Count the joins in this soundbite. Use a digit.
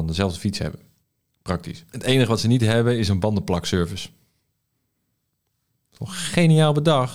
1